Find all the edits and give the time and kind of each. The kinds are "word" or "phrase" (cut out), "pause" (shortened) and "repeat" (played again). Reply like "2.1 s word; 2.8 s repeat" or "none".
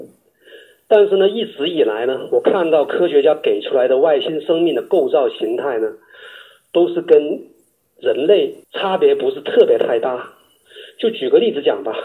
8.6 s pause